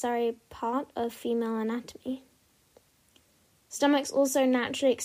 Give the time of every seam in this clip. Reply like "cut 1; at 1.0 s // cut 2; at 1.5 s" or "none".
none